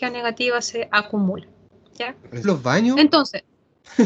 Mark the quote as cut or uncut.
cut